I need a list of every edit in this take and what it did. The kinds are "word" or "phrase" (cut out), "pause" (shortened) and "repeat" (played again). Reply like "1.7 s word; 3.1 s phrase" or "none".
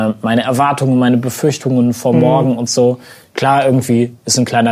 none

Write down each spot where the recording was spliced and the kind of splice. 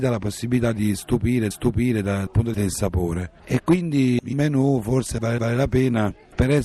1.5 s repeat; 2.5 s word; 3.4 s pause; 4.3 s word; 5.4 s repeat

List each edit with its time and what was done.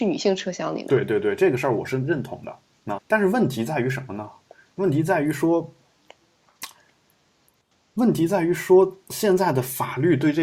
3.0 s word

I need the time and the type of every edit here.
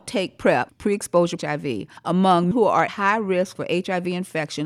1.4 s phrase; 2.5 s word; 2.9 s word

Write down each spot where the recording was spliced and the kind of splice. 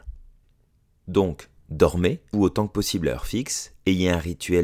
2.3 s word

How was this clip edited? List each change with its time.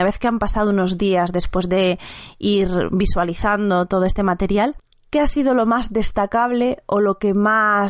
none

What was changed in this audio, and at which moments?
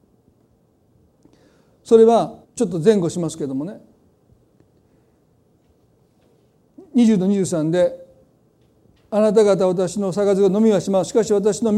2.4 s pause

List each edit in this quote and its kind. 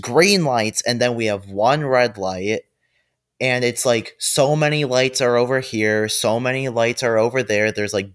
none

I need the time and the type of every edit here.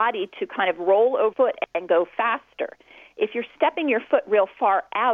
1.3 s word

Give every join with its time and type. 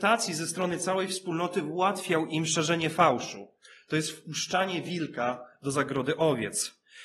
none

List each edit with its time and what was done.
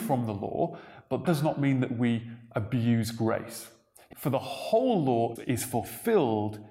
1.2 s word; 4.1 s word; 5.4 s word

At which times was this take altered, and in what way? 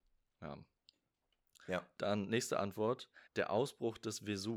3.3 s pause

